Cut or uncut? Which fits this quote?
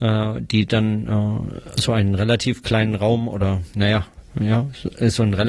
uncut